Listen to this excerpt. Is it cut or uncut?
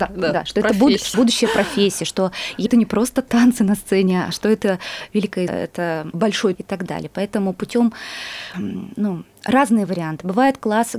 cut